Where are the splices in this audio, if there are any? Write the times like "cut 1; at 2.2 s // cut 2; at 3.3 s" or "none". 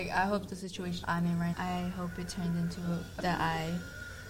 cut 1; at 1.0 s // cut 2; at 1.5 s // cut 3; at 3.2 s